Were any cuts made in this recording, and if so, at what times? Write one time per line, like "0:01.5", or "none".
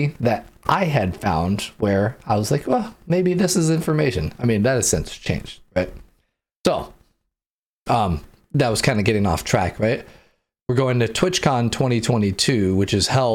none

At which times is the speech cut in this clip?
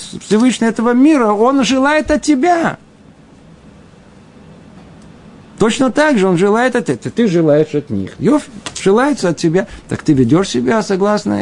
none

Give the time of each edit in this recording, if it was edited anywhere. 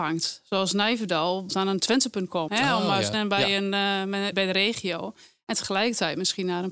0:01.5
0:02.5
0:03.1
0:04.3

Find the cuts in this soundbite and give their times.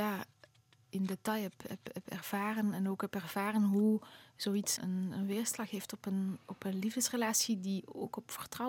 0:04.8

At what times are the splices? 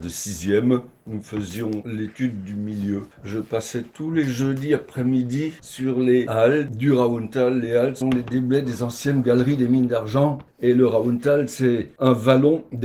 0:08.0

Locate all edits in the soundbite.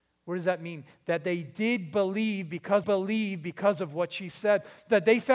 0:02.8

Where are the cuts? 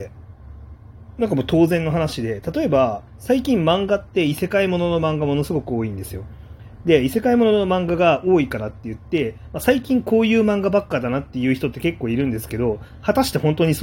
0:03.1

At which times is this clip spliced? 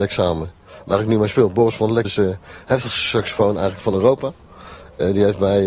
0:02.0

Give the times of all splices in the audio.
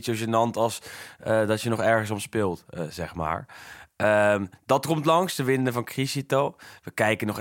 none

